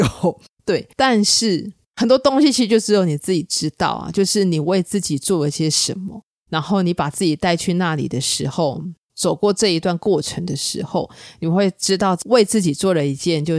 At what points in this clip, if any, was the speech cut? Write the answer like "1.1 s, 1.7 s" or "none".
0.9 s